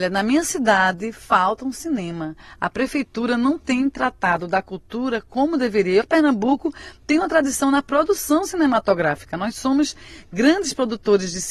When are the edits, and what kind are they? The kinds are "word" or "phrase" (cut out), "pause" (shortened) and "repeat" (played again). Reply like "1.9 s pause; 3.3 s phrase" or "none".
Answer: 6.0 s word